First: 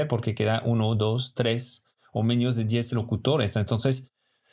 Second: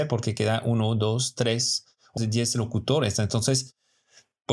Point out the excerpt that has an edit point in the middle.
second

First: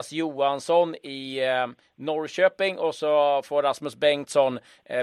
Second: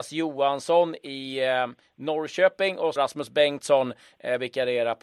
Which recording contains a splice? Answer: second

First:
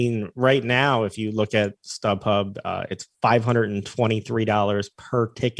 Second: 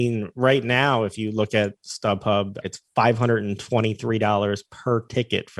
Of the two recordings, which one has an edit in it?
second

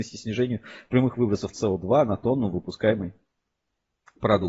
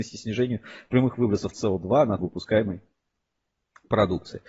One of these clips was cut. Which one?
second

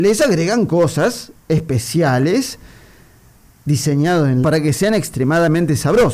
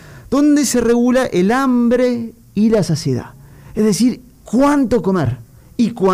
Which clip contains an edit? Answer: first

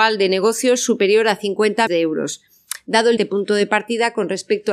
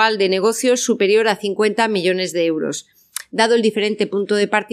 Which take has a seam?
first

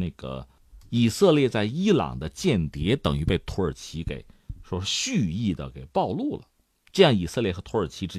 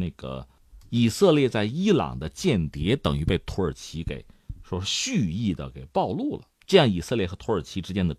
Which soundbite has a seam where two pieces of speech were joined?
second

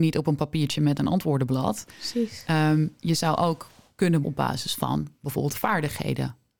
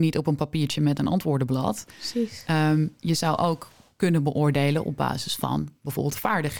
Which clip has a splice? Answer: first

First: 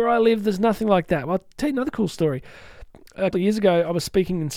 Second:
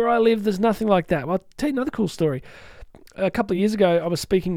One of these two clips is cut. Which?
first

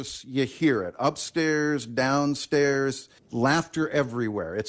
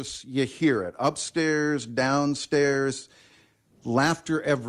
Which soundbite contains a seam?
first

